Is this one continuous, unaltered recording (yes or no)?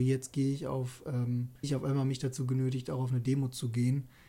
no